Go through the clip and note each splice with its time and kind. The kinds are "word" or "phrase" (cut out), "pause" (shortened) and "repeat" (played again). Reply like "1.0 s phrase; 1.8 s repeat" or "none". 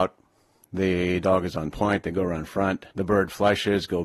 2.9 s pause